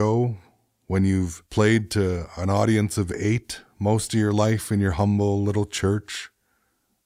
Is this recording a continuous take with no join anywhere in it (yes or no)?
no